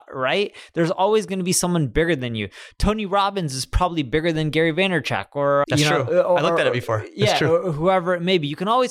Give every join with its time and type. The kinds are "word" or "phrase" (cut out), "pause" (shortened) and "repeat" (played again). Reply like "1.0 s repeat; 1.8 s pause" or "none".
5.6 s word